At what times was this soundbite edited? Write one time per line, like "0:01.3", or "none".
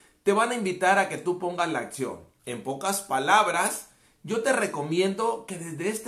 0:02.4